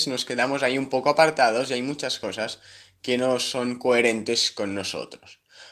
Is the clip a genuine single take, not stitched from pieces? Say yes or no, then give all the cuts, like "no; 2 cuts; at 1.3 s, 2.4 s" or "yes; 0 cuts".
yes; 0 cuts